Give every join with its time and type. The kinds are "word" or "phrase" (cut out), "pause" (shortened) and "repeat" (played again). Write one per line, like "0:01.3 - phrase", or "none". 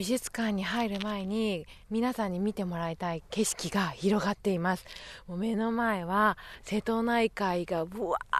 0:01.8 - pause